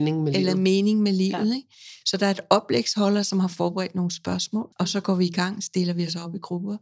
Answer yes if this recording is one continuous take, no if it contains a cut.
no